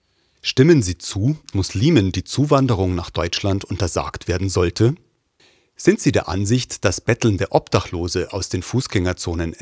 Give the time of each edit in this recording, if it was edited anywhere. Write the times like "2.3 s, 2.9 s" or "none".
1.5 s